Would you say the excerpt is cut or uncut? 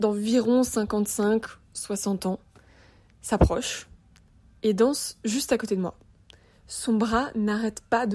uncut